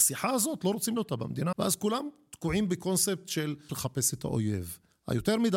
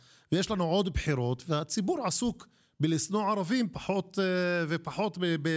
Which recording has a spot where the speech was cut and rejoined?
first; 3 cuts; at 1.0 s, 1.5 s, 3.7 s

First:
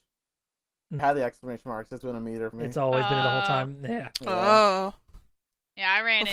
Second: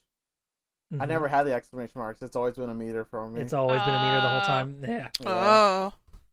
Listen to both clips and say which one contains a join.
first; 4 cuts; at 1.0 s, 2.0 s, 2.5 s, 3.2 s

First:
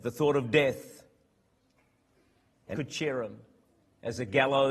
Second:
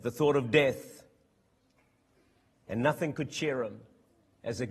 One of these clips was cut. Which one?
first; 1 cut; at 2.7 s

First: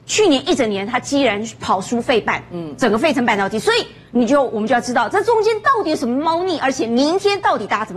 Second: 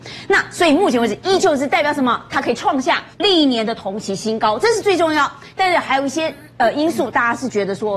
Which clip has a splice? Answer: second; 1 cut; at 3.1 s

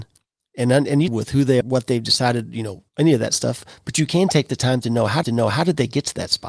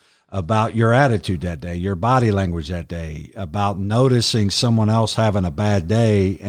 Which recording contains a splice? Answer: first; 4 cuts; at 1.1 s, 1.6 s, 2.9 s, 5.2 s

